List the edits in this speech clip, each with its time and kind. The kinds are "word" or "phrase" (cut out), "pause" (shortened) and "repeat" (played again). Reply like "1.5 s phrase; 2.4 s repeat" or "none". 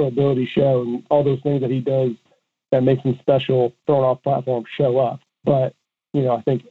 3.8 s word